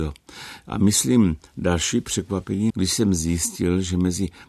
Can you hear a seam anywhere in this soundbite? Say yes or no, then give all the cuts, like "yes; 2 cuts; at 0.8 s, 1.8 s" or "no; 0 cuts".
yes; 1 cut; at 2.7 s